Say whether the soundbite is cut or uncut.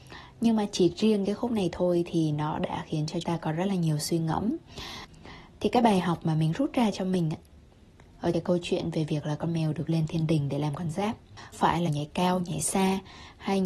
cut